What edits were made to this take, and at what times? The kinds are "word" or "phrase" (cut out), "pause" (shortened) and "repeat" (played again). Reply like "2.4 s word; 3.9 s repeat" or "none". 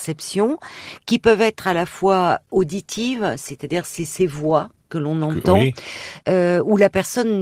none